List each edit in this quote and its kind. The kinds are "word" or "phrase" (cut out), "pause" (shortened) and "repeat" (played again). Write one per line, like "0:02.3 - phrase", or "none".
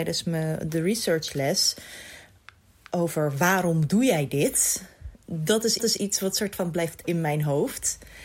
0:05.1 - pause
0:05.8 - repeat
0:07.0 - word

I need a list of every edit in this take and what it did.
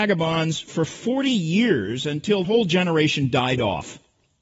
0:02.4 - word

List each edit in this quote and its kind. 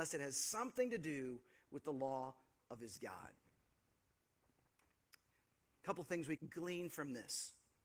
0:06.4 - word

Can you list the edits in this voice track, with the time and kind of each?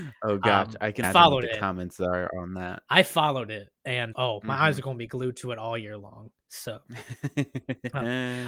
0:01.0 - phrase
0:02.8 - pause
0:04.1 - word
0:06.4 - pause

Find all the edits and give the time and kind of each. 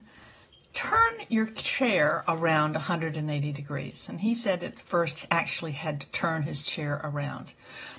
0:05.3 - word

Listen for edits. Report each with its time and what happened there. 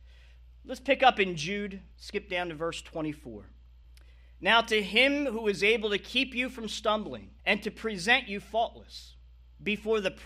0:01.9 - pause
0:03.8 - pause
0:07.4 - pause

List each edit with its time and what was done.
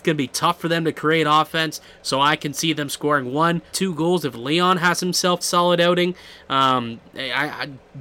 0:03.7 - word
0:05.4 - phrase

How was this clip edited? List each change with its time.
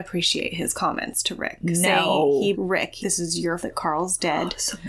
0:02.5 - word
0:03.0 - phrase
0:03.6 - word

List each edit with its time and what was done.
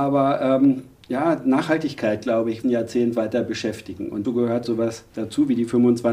0:02.6 - phrase
0:04.2 - word
0:04.6 - word

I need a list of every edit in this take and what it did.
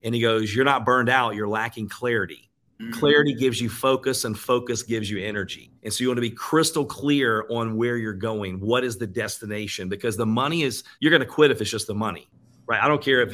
0:02.7 - pause
0:05.8 - pause
0:10.9 - pause

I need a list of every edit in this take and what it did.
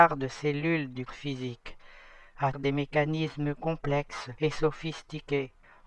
0:01.1 - word
0:02.5 - word

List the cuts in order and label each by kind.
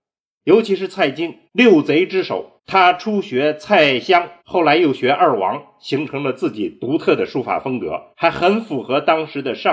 0:01.5 - pause
0:02.6 - pause
0:04.4 - pause
0:08.1 - pause

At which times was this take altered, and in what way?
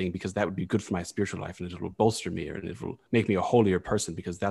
none

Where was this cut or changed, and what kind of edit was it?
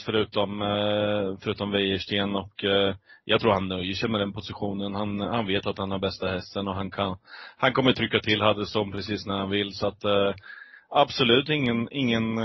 none

